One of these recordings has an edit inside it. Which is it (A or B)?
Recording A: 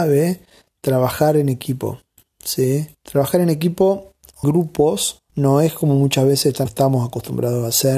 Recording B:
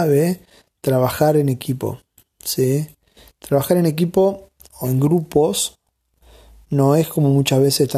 A